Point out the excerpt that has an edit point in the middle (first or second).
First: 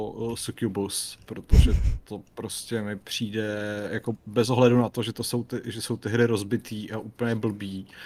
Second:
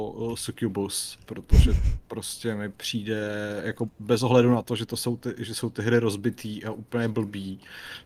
second